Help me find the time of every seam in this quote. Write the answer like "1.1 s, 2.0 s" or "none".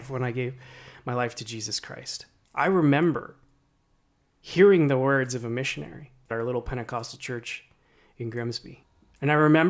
6.3 s

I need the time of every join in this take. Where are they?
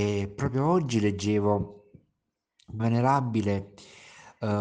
2.8 s

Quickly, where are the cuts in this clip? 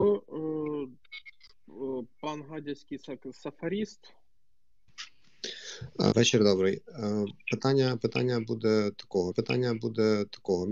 6.1 s, 9.3 s

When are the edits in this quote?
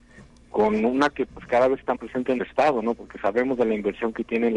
1.1 s, 1.9 s, 2.4 s

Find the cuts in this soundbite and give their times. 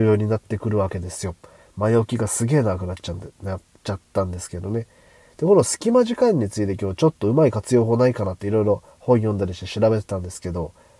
none

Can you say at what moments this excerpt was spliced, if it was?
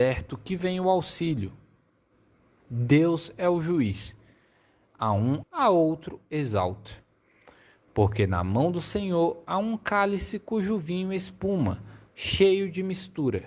5.4 s

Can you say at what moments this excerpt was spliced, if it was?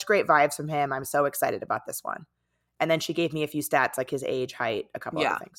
none

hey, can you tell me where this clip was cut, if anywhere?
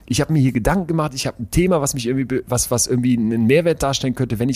none

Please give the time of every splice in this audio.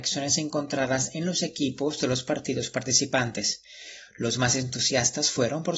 none

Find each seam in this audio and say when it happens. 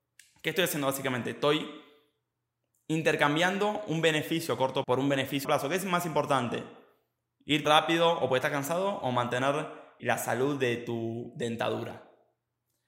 4.8 s, 5.4 s, 7.6 s, 10.0 s

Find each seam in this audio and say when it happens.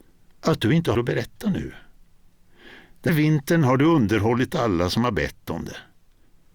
0.9 s, 3.1 s

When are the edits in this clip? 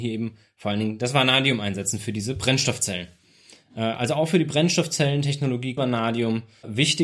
5.8 s

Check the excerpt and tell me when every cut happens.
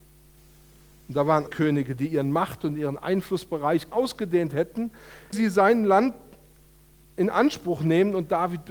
1.5 s, 3.9 s, 5.3 s

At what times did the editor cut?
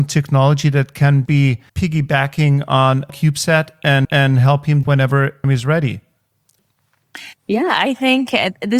1.3 s, 1.7 s, 3.1 s, 4.0 s, 4.8 s, 5.4 s

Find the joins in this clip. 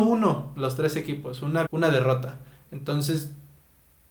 1.7 s

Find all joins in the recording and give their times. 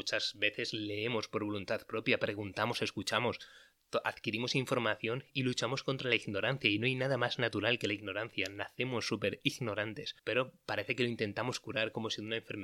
10.2 s

